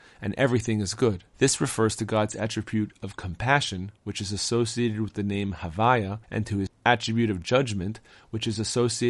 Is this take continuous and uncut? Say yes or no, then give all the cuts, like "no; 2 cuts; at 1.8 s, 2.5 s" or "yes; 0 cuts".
no; 3 cuts; at 1.3 s, 6.2 s, 6.7 s